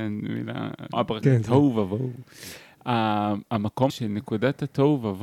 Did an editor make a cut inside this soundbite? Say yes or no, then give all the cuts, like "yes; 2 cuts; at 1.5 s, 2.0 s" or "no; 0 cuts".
yes; 3 cuts; at 0.9 s, 1.2 s, 3.9 s